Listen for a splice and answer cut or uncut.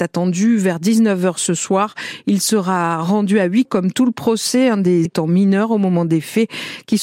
cut